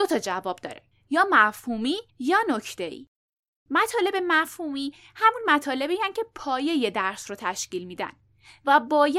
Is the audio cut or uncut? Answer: cut